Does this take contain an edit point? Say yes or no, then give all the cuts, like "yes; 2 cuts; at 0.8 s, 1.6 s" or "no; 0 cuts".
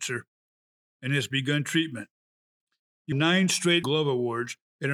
yes; 2 cuts; at 3.1 s, 3.8 s